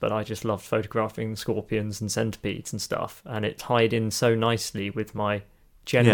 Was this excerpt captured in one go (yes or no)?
yes